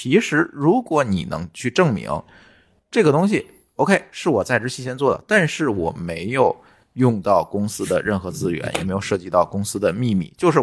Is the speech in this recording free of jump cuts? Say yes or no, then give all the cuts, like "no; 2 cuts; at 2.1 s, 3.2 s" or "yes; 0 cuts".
yes; 0 cuts